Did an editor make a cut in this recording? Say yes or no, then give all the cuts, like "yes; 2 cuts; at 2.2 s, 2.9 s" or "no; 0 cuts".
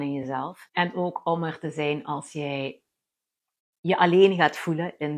no; 0 cuts